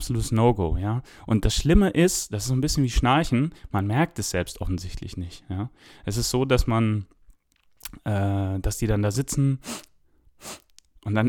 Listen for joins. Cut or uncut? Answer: uncut